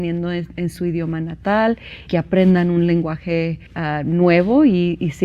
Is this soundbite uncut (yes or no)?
no